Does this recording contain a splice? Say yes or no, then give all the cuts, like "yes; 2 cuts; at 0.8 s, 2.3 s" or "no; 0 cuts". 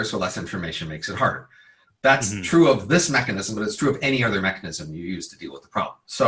no; 0 cuts